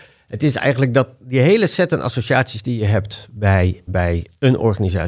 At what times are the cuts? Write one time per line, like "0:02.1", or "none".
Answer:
0:03.9